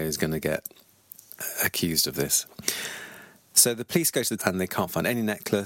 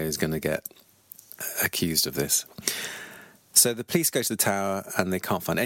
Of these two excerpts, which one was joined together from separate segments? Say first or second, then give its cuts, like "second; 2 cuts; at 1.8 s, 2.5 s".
first; 1 cut; at 4.4 s